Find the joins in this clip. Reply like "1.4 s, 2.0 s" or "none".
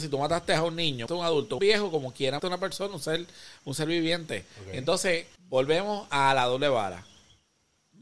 1.1 s, 1.6 s, 2.4 s, 5.4 s